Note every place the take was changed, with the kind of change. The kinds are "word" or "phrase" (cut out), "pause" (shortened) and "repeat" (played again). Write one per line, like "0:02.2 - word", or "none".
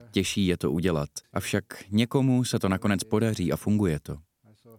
0:01.2 - pause